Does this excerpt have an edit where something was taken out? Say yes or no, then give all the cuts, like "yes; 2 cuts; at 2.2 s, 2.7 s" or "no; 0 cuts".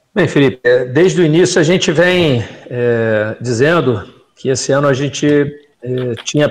no; 0 cuts